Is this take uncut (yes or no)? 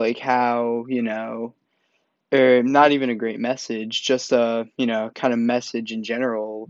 yes